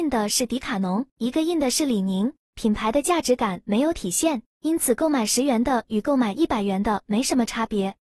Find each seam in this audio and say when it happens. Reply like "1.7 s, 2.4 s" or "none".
1.1 s, 2.4 s, 4.5 s